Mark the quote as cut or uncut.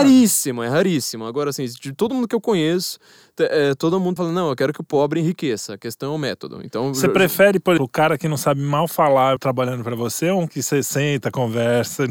cut